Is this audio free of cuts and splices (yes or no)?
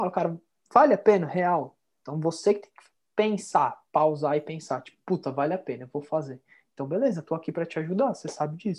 yes